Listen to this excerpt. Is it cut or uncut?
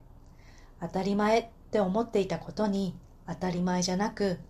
uncut